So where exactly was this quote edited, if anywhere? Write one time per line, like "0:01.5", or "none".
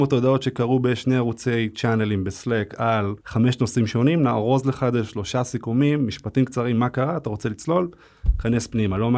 0:03.2